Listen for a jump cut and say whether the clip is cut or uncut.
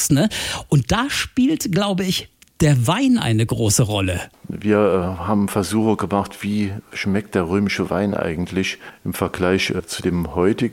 uncut